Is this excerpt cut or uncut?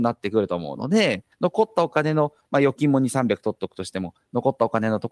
cut